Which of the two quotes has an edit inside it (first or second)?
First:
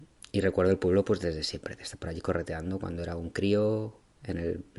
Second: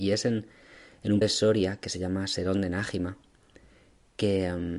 second